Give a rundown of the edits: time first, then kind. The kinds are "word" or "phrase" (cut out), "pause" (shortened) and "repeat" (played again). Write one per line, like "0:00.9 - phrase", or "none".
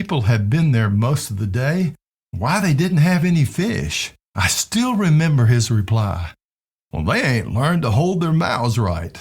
0:04.2 - pause